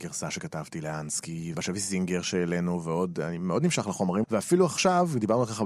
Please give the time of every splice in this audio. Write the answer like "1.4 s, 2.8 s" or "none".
1.5 s, 4.2 s

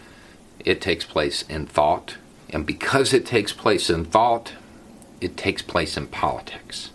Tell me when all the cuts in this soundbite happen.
none

